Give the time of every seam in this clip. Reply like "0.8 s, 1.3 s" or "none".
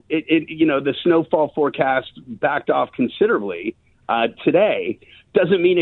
none